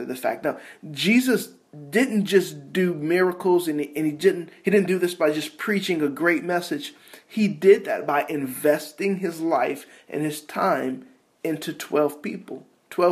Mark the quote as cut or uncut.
uncut